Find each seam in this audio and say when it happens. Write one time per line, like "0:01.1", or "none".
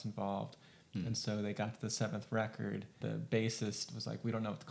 0:03.0